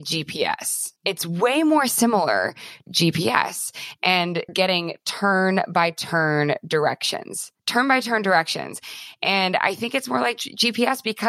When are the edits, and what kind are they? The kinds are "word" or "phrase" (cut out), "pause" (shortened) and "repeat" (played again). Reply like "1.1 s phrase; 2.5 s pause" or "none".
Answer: 1.0 s pause; 2.9 s word; 4.5 s word; 7.6 s pause